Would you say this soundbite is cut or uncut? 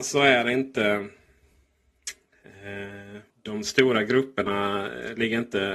cut